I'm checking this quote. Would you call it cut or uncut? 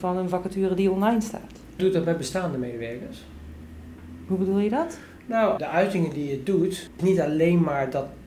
cut